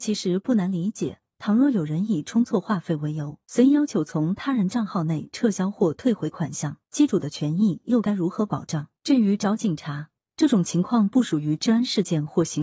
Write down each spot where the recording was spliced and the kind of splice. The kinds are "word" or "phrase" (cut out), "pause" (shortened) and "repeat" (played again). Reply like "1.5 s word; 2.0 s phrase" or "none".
3.4 s pause; 6.8 s pause; 9.0 s pause